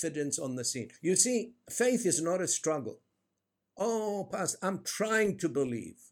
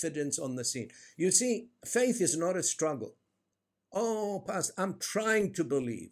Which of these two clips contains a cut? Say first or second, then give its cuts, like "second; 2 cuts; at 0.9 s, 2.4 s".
first; 1 cut; at 1.0 s